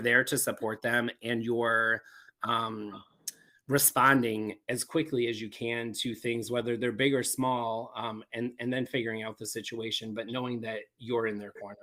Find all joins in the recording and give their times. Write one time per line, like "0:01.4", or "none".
none